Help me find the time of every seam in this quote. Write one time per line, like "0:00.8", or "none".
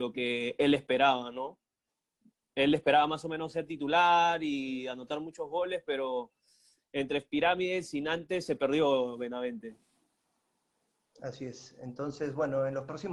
none